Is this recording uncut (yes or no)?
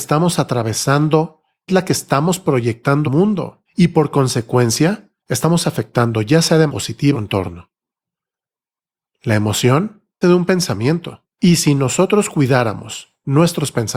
no